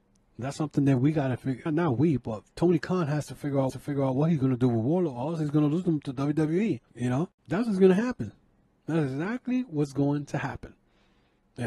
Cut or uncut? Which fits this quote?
cut